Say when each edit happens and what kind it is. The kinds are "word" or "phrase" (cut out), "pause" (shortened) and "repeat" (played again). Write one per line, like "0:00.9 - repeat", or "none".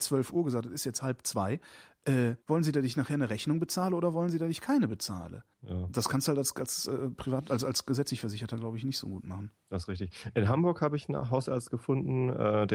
0:02.4 - pause
0:05.5 - pause